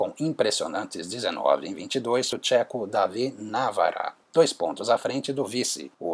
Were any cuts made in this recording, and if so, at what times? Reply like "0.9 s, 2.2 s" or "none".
2.3 s